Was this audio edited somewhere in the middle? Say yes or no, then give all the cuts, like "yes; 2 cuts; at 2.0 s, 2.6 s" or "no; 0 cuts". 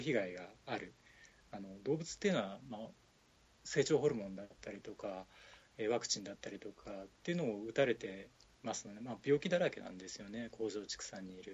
no; 0 cuts